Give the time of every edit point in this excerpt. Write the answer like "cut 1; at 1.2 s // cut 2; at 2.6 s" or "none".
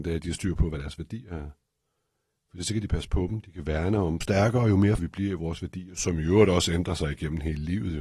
cut 1; at 4.2 s // cut 2; at 5.0 s